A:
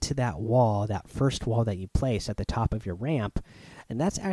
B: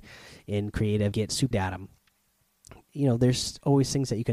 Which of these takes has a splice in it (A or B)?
B